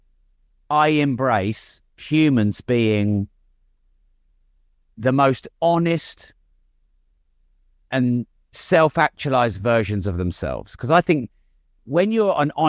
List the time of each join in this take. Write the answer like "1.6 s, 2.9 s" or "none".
1.9 s, 5.5 s